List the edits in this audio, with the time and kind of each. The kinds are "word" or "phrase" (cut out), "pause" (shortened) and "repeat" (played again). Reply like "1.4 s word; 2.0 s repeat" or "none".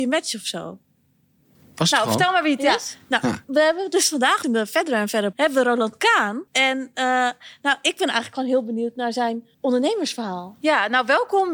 3.4 s pause; 4.4 s phrase; 5.3 s word; 6.5 s pause; 9.5 s pause